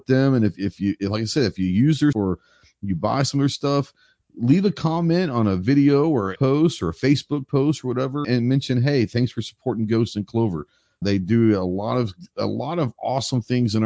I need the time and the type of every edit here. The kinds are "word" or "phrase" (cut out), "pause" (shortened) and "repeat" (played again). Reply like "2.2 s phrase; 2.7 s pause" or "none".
2.1 s word; 6.4 s word; 8.2 s word; 11.0 s word